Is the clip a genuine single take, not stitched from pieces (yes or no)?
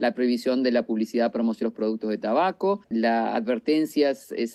no